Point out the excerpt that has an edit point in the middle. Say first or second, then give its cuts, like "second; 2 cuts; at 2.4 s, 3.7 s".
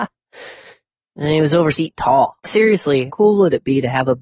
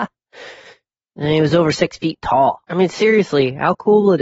first; 3 cuts; at 1.7 s, 2.4 s, 3.1 s